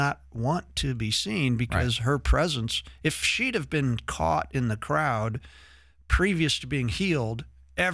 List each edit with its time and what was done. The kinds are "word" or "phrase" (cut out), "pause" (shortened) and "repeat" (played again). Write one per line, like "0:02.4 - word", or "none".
none